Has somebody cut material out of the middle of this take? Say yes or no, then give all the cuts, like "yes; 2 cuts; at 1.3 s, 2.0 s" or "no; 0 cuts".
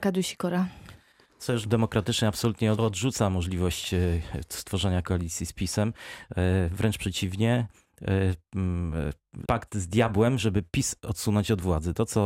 yes; 3 cuts; at 1.6 s, 2.7 s, 9.4 s